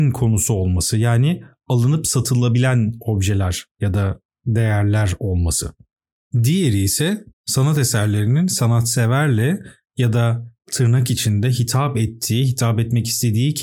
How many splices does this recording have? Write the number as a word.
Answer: two